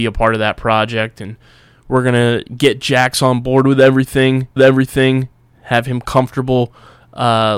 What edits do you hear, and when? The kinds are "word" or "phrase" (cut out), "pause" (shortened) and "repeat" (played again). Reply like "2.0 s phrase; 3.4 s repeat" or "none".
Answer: 4.6 s repeat